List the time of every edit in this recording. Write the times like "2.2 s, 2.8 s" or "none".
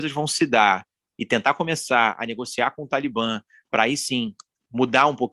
none